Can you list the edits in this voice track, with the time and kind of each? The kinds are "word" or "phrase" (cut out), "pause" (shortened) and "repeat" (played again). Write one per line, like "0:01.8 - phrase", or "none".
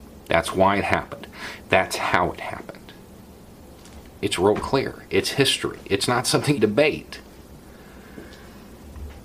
0:06.6 - phrase